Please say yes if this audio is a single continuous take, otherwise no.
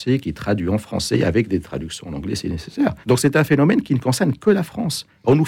no